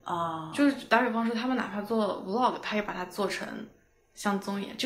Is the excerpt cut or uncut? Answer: uncut